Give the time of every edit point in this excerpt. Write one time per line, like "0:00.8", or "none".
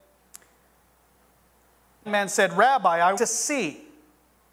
0:02.1
0:03.2